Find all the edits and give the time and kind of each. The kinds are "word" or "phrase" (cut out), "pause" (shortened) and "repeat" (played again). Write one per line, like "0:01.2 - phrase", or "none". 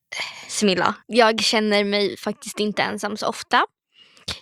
0:01.0 - pause